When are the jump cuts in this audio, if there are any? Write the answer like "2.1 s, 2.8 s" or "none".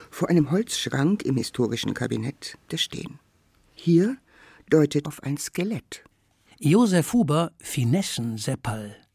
2.7 s, 5.0 s, 7.6 s